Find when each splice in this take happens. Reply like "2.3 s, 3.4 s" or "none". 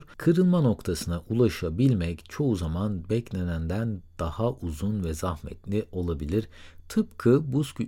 none